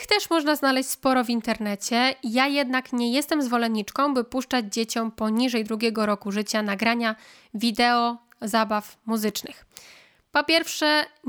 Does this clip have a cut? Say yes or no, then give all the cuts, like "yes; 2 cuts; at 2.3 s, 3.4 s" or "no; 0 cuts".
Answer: no; 0 cuts